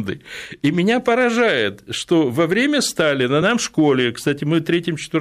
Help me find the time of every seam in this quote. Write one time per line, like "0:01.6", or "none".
none